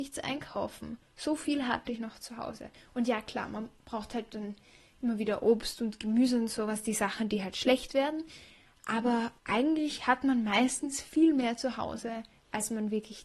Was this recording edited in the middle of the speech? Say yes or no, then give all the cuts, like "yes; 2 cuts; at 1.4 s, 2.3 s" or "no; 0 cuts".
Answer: yes; 2 cuts; at 1.0 s, 9.4 s